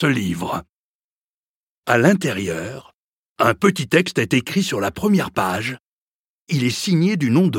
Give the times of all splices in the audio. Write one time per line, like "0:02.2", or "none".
none